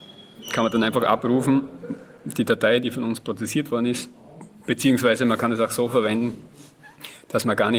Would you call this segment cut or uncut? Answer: uncut